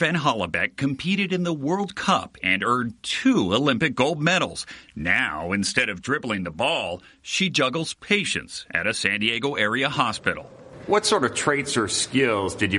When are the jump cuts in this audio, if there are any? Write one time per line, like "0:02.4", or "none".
none